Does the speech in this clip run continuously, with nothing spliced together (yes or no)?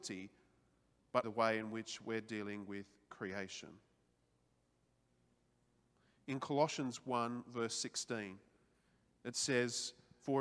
no